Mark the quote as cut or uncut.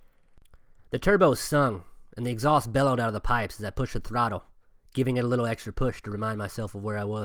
uncut